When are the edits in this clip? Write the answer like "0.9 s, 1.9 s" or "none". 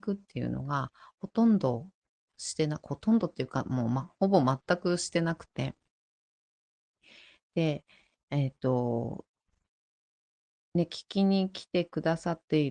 none